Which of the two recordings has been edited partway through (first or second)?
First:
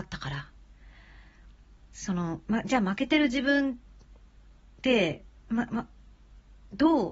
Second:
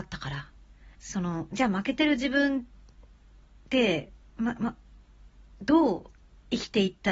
second